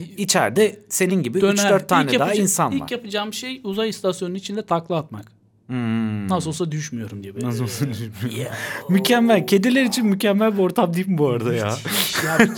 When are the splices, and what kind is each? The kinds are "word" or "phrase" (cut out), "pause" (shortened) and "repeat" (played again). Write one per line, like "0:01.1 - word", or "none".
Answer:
none